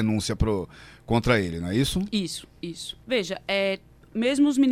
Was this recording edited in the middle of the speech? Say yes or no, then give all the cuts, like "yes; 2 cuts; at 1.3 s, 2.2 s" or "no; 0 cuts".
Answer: yes; 1 cut; at 3.0 s